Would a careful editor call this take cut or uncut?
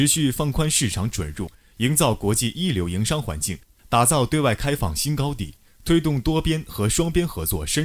uncut